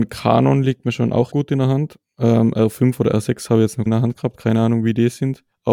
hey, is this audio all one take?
no; 2 cuts; at 1.3 s, 3.9 s

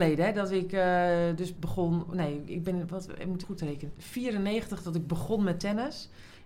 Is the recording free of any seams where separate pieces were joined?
no; 3 cuts; at 1.6 s, 3.4 s, 3.9 s

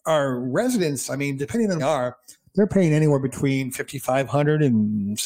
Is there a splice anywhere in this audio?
yes; 1 cut; at 1.8 s

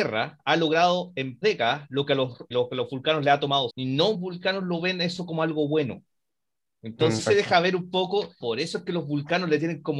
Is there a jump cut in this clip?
yes; 6 cuts; at 1.4 s, 2.5 s, 3.7 s, 4.1 s, 7.2 s, 8.4 s

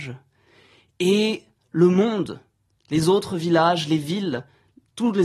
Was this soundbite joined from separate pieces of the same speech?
no; 0 cuts

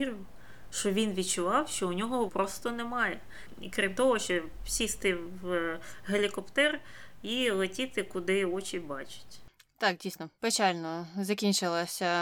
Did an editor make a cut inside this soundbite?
yes; 2 cuts; at 2.3 s, 10.4 s

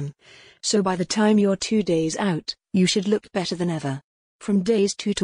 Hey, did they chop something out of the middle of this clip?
no; 0 cuts

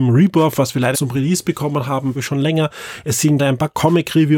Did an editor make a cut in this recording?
yes; 3 cuts; at 0.9 s, 2.2 s, 3.4 s

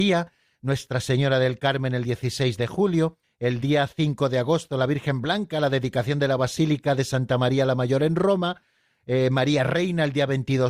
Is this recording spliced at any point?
no; 0 cuts

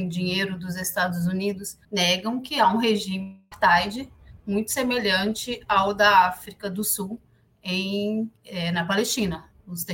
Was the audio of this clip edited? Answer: yes; 2 cuts; at 1.8 s, 8.4 s

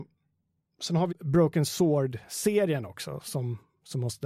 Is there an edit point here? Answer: yes; 1 cut; at 1.1 s

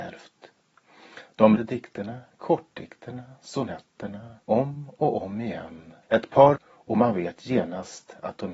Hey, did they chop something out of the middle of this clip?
yes; 4 cuts; at 1.6 s, 4.4 s, 6.0 s, 6.6 s

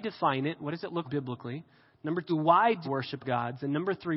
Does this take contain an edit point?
yes; 4 cuts; at 1.0 s, 2.3 s, 2.8 s, 3.2 s

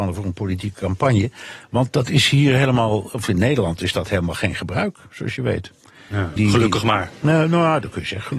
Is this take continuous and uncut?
no; 1 cut; at 6.4 s

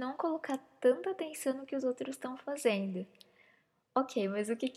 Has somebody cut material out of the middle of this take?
no; 0 cuts

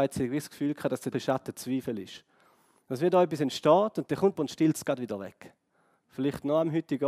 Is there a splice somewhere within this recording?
yes; 2 cuts; at 1.1 s, 4.4 s

